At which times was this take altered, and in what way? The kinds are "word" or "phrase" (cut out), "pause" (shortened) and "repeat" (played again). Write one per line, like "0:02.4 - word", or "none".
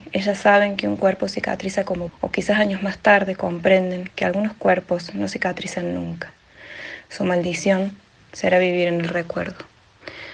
0:02.1 - word